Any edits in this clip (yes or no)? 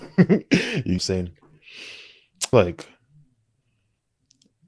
yes